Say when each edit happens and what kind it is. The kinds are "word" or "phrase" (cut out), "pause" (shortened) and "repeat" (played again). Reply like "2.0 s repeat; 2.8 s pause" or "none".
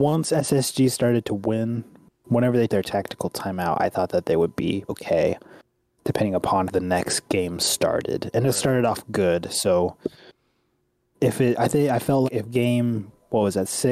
2.7 s word; 4.9 s word; 6.7 s word; 12.2 s word